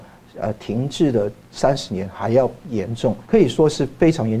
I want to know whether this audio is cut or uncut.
cut